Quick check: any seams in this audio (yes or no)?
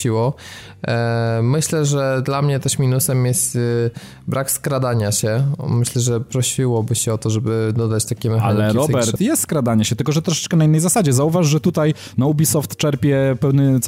yes